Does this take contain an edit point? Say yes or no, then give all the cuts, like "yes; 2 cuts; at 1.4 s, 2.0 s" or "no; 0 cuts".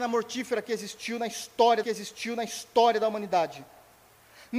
yes; 1 cut; at 1.8 s